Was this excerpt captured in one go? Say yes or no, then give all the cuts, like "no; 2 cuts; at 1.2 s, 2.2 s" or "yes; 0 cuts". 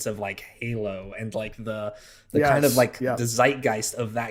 yes; 0 cuts